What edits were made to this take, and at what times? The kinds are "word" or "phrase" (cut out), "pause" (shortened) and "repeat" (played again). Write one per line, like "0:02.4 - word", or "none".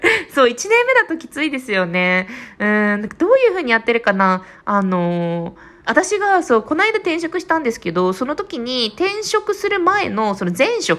0:05.8 - pause